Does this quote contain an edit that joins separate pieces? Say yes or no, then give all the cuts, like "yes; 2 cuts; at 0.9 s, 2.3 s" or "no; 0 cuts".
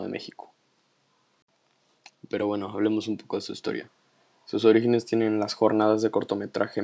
no; 0 cuts